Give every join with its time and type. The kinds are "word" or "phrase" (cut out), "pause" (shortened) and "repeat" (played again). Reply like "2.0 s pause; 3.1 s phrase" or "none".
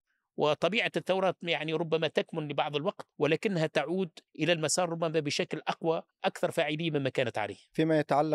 3.1 s pause; 4.3 s pause; 6.2 s word